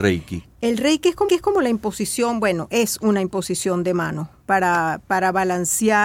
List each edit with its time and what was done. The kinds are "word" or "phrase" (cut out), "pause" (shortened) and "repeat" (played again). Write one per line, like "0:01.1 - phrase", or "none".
0:01.3 - repeat